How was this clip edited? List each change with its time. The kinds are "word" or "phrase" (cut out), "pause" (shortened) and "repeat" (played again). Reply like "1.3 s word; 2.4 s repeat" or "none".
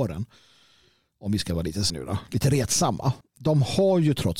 1.9 s word; 3.2 s pause